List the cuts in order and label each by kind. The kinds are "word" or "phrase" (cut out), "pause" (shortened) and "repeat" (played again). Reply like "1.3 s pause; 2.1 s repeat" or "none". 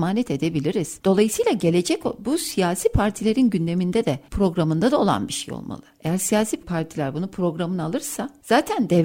none